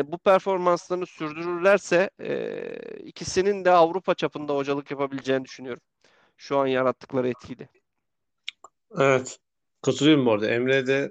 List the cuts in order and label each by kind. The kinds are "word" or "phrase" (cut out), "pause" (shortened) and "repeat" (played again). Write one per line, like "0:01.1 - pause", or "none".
none

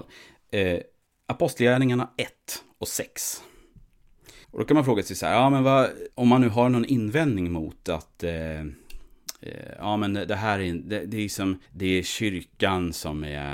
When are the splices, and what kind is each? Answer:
0:04.4 - pause
0:06.1 - pause
0:11.7 - pause

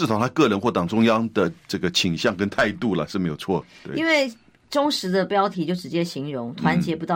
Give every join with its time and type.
none

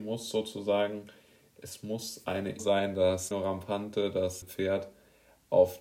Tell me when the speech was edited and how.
0:02.6 - word
0:03.3 - word
0:04.4 - word

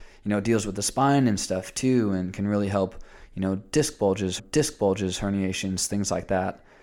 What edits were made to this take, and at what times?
0:04.4 - repeat

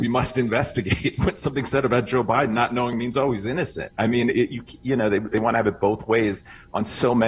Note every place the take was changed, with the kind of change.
none

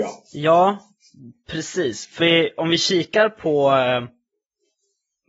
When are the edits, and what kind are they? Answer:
0:02.2 - word

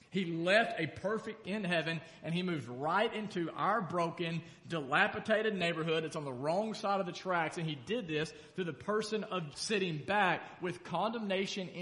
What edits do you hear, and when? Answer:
0:01.4 - word
0:09.5 - phrase

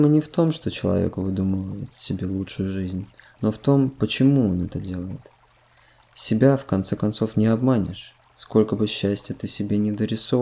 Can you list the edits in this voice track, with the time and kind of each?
none

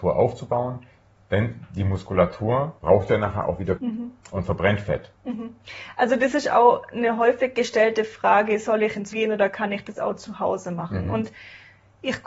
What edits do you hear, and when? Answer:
0:02.8 - pause
0:03.8 - word
0:09.1 - word

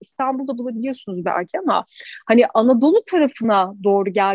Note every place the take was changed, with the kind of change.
none

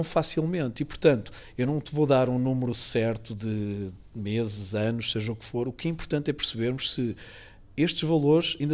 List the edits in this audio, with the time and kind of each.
none

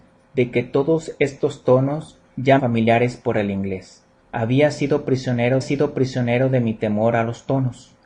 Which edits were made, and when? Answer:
0:02.6 - phrase
0:04.2 - pause
0:05.6 - repeat

